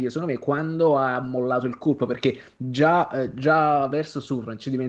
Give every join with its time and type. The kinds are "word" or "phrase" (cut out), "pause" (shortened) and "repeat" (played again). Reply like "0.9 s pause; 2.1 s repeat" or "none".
3.9 s word